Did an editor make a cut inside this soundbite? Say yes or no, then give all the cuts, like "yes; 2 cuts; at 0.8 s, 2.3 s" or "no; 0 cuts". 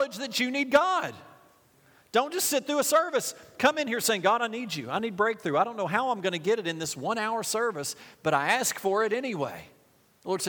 no; 0 cuts